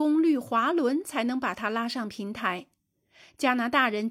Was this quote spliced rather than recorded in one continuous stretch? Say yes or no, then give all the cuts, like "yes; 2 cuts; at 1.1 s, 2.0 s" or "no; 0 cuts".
no; 0 cuts